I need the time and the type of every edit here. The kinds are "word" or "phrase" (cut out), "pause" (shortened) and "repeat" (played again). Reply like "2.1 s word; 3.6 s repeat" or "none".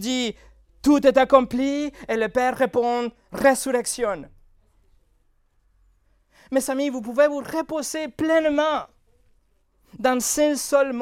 none